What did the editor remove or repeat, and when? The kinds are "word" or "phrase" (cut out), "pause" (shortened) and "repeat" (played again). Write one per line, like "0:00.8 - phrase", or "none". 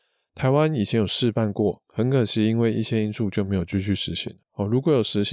0:04.4 - pause